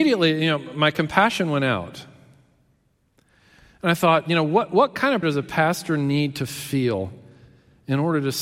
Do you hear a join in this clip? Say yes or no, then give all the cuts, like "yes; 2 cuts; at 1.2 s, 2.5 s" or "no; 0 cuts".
yes; 1 cut; at 5.2 s